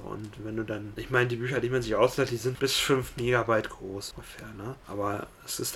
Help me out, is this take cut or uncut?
cut